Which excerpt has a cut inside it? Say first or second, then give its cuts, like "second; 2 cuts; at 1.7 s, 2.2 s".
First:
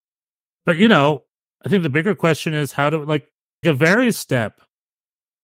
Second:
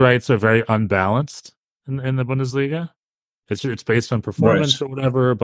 first; 3 cuts; at 1.4 s, 3.6 s, 4.1 s